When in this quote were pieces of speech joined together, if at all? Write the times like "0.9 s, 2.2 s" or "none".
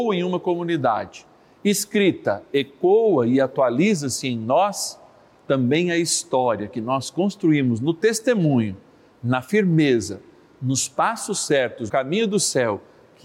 11.9 s